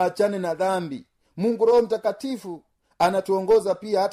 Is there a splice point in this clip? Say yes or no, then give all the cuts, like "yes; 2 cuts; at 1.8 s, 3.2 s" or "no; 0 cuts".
no; 0 cuts